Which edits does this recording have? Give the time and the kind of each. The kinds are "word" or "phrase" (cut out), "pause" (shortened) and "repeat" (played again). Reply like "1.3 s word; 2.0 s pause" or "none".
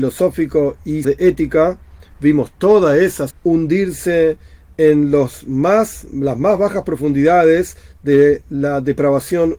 1.0 s word; 3.3 s word